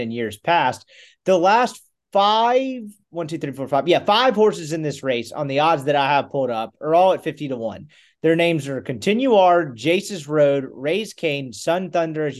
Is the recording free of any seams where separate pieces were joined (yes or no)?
yes